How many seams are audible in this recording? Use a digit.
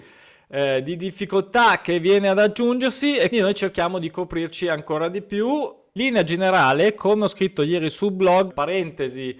3